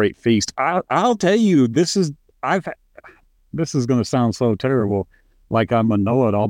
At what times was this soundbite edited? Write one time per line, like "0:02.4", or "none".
none